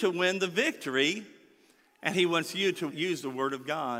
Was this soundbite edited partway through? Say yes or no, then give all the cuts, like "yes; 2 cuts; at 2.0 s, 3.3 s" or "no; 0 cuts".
yes; 1 cut; at 2.9 s